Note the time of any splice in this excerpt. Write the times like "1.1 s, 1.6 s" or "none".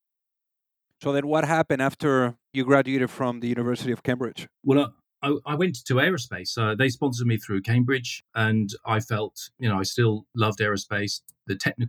4.6 s, 5.4 s